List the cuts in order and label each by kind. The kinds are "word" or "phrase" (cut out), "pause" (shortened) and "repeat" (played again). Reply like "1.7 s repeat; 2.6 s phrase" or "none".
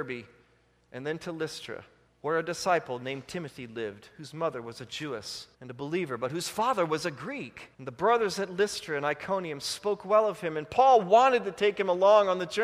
2.1 s pause; 5.5 s pause; 7.7 s pause